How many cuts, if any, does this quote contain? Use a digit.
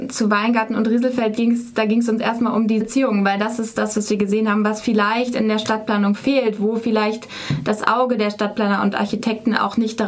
1